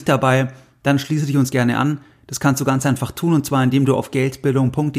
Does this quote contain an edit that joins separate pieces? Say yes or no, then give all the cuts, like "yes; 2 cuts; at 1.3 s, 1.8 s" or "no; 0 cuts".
no; 0 cuts